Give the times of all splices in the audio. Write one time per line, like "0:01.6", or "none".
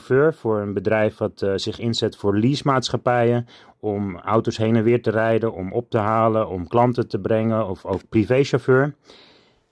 none